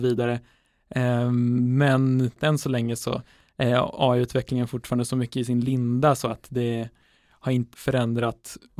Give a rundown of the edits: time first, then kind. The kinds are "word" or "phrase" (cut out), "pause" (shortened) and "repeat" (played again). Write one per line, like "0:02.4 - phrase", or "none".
0:07.7 - word

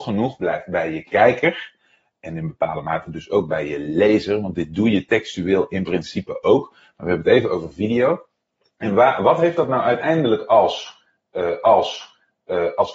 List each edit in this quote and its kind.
0:11.6 - repeat

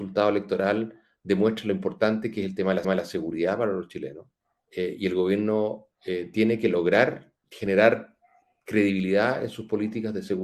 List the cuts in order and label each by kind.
0:02.8 - repeat
0:04.5 - pause
0:05.9 - pause
0:07.4 - pause

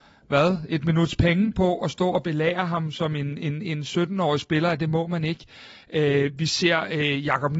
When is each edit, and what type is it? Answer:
none

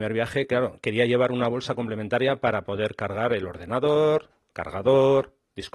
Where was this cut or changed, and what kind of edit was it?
none

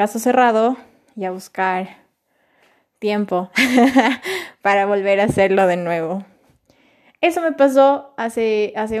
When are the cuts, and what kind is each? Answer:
none

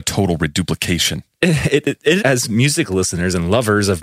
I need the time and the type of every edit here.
0:02.2 - phrase

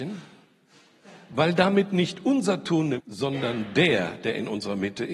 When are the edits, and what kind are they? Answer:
0:03.0 - phrase

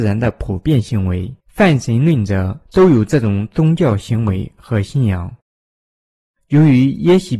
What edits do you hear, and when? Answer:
0:01.4 - pause
0:02.6 - pause

